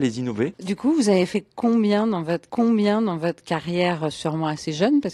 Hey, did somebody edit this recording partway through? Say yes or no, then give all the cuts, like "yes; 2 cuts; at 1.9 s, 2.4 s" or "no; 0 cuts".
yes; 1 cut; at 2.5 s